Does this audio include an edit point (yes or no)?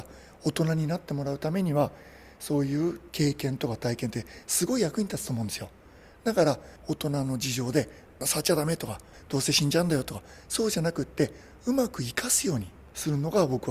no